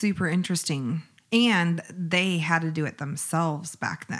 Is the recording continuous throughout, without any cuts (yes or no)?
yes